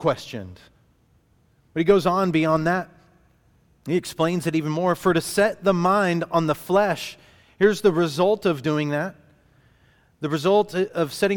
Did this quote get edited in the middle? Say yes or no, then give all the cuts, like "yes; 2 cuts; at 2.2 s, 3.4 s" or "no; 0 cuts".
no; 0 cuts